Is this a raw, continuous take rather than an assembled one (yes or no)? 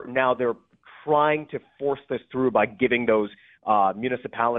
yes